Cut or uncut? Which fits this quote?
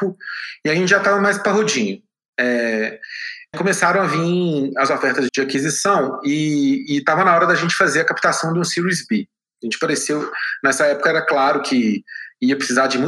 cut